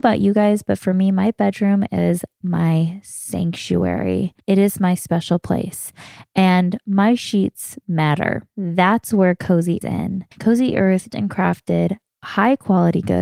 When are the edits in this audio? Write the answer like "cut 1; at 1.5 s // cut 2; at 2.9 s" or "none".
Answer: cut 1; at 4.4 s // cut 2; at 8.5 s // cut 3; at 9.8 s // cut 4; at 10.3 s // cut 5; at 11.1 s